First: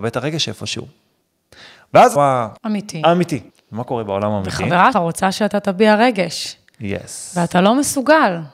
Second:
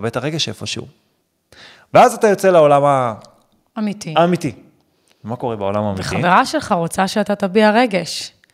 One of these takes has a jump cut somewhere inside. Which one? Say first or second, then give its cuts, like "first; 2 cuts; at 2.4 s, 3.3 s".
first; 4 cuts; at 2.2 s, 2.6 s, 3.5 s, 4.9 s